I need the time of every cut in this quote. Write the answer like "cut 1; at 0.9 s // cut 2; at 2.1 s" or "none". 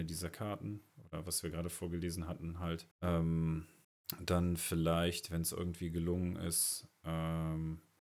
cut 1; at 2.9 s